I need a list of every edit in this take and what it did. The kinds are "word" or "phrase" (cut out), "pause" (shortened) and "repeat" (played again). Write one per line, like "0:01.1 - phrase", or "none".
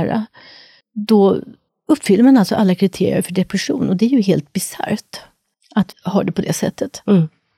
0:05.9 - word